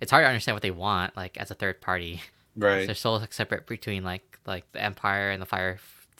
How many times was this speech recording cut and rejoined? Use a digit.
2